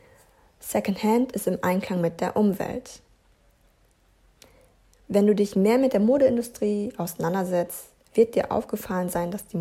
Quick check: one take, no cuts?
yes; 0 cuts

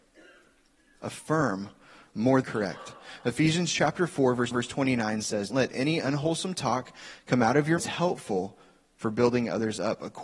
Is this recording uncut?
no; 4 cuts; at 2.4 s, 4.5 s, 5.5 s, 7.8 s

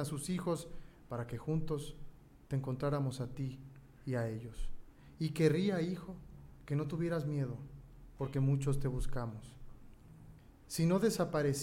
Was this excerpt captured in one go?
yes; 0 cuts

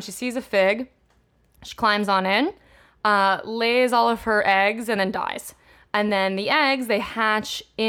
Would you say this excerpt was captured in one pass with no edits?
yes; 0 cuts

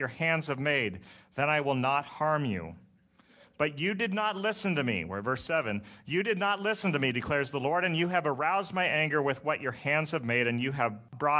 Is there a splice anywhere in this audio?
no; 0 cuts

